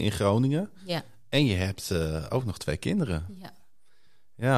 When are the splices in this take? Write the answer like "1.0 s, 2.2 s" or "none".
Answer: none